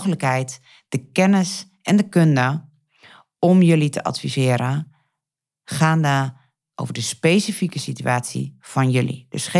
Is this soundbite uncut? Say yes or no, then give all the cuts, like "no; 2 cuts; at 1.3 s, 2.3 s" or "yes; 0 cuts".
yes; 0 cuts